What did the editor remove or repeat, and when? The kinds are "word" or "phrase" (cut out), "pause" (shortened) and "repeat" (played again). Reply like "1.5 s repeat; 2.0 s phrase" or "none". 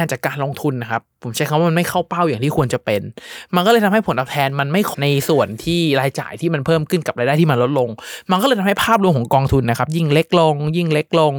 4.9 s word

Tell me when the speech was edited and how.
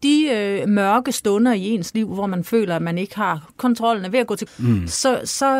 4.5 s word

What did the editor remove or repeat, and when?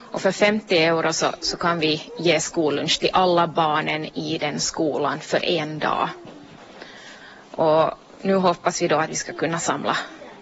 none

